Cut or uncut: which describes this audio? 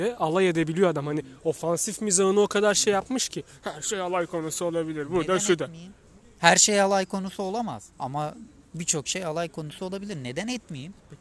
cut